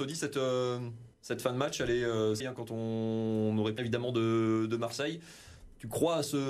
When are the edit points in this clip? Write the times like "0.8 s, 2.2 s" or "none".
1.1 s, 2.4 s, 3.8 s